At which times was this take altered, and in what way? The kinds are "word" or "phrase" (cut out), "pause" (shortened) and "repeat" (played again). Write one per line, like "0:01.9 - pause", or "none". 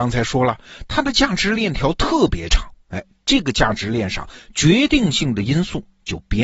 none